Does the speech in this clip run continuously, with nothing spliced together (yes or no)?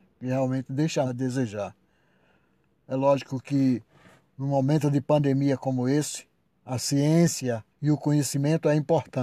no